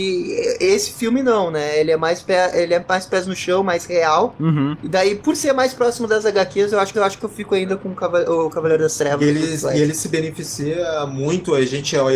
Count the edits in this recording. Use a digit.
1